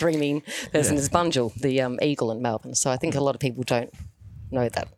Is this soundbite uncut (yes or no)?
yes